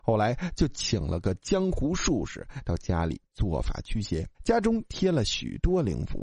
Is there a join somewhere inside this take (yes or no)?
yes